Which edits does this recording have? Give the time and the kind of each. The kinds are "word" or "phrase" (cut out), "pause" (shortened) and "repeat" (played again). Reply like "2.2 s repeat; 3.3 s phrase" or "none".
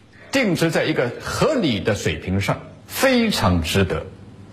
2.8 s pause